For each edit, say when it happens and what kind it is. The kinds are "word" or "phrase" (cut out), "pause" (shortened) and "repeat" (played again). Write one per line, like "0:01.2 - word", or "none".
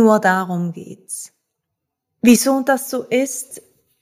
none